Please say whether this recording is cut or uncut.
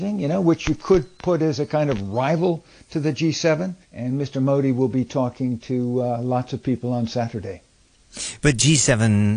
cut